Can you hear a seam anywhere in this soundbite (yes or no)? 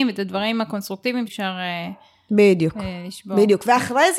yes